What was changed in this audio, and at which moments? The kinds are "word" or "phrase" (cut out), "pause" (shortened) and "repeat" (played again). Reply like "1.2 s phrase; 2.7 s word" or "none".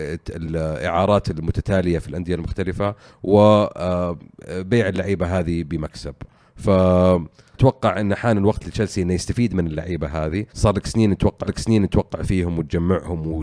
7.5 s word; 10.5 s pause; 11.5 s repeat